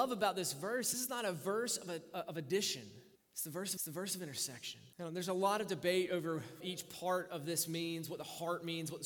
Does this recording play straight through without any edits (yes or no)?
no